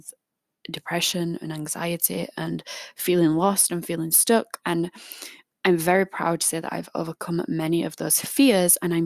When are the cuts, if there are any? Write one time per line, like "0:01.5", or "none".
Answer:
none